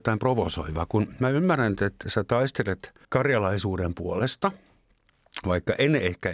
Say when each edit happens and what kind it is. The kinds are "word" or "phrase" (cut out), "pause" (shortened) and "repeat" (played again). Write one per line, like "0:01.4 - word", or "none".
0:03.0 - pause